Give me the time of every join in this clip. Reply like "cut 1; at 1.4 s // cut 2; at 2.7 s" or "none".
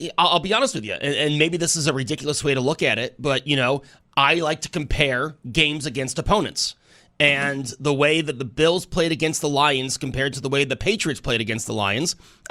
none